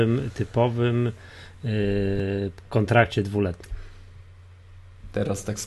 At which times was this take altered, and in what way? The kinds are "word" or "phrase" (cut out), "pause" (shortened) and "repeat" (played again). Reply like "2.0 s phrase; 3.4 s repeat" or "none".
none